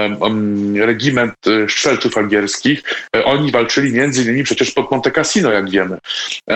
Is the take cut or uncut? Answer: uncut